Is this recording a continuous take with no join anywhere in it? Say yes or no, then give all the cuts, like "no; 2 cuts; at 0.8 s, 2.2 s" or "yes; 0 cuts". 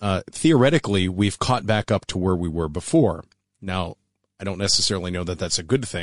yes; 0 cuts